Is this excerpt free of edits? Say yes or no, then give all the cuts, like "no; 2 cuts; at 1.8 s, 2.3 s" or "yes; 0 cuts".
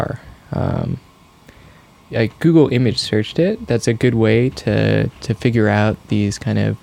yes; 0 cuts